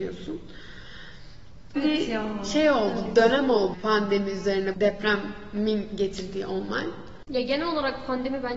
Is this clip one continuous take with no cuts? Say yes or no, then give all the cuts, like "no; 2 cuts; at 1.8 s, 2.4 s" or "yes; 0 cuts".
no; 3 cuts; at 1.8 s, 3.7 s, 4.7 s